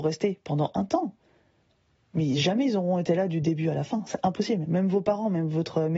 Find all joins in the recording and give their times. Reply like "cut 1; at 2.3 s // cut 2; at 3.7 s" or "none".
none